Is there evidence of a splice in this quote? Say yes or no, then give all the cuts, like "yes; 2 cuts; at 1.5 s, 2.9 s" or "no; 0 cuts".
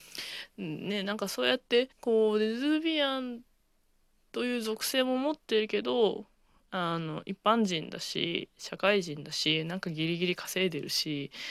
yes; 1 cut; at 1.9 s